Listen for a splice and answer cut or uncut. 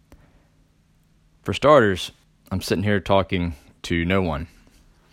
uncut